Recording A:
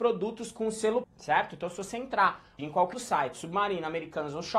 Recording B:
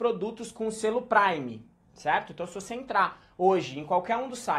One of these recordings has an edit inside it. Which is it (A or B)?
A